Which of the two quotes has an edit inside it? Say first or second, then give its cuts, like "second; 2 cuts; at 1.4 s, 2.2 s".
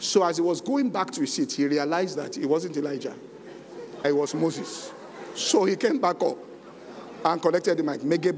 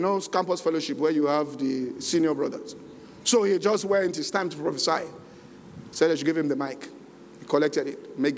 first; 1 cut; at 4.0 s